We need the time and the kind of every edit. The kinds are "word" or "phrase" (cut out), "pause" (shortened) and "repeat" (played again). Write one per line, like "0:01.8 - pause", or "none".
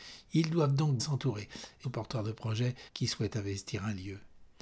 0:01.0 - word
0:01.8 - phrase
0:02.9 - pause